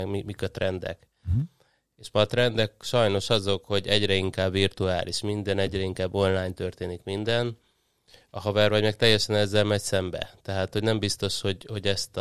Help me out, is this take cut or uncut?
uncut